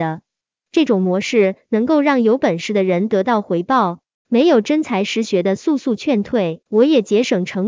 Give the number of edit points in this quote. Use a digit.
1